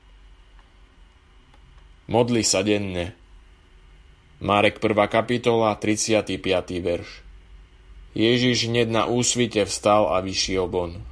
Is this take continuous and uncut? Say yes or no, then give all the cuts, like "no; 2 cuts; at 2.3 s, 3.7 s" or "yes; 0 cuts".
yes; 0 cuts